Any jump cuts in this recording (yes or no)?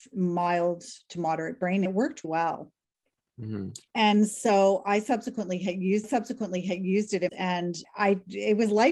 yes